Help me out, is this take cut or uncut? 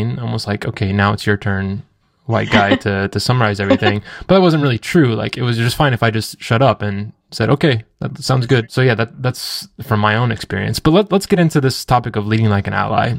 uncut